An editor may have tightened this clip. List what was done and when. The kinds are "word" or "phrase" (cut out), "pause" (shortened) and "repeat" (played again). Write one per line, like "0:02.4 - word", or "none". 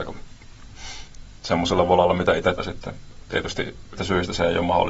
0:02.6 - word
0:04.0 - word